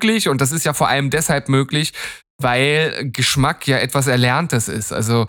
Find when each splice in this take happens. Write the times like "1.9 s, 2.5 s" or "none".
none